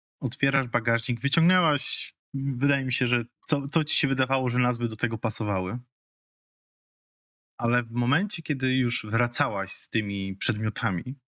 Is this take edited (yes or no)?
no